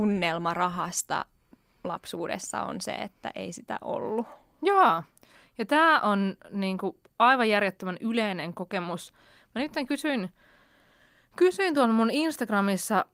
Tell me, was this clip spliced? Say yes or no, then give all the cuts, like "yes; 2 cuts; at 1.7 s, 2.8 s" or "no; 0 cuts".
no; 0 cuts